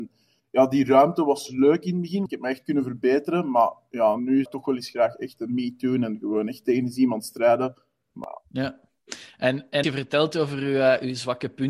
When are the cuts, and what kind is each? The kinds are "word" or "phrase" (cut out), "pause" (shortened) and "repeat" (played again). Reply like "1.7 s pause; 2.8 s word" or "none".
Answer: 2.3 s word; 4.5 s word; 9.8 s word